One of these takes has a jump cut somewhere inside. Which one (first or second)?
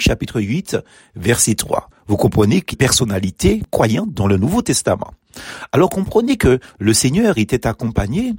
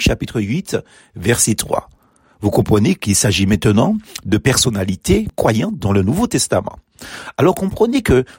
first